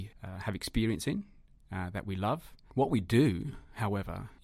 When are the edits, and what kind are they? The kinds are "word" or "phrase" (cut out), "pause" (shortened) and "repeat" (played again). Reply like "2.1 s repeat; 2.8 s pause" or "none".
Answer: none